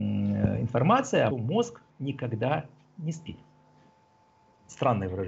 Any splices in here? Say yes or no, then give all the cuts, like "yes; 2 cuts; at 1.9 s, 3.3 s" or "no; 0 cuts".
yes; 2 cuts; at 1.3 s, 1.9 s